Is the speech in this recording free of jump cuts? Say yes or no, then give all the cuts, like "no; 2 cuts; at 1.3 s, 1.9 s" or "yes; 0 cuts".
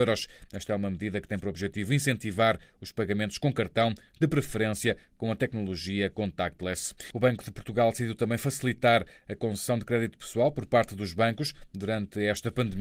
yes; 0 cuts